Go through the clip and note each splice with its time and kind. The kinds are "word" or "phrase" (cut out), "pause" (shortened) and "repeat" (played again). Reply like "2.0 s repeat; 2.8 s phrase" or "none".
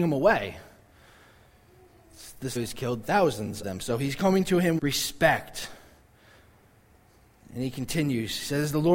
2.6 s phrase; 3.0 s phrase; 3.6 s word; 4.8 s word